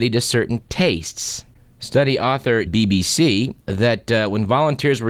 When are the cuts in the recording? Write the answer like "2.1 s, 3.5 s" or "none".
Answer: 1.5 s, 2.7 s